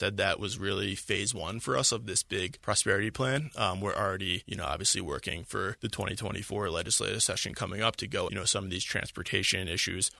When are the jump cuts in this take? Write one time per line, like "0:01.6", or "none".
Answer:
0:08.3